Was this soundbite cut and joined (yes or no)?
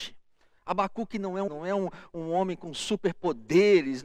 yes